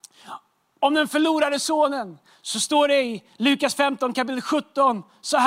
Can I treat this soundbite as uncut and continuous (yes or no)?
yes